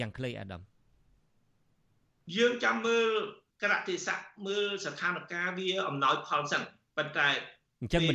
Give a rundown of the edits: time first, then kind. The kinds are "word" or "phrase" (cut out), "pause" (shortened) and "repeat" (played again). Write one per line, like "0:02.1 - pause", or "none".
0:03.5 - pause